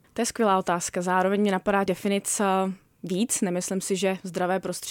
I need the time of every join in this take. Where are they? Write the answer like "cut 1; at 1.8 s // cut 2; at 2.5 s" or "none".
cut 1; at 1.9 s